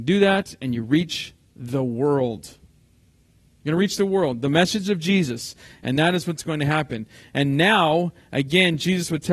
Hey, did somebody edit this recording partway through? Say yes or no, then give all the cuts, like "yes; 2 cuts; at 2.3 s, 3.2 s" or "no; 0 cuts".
no; 0 cuts